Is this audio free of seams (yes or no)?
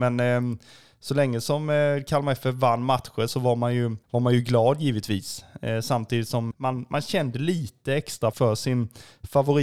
no